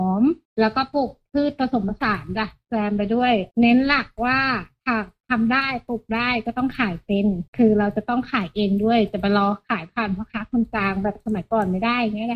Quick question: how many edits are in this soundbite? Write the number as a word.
two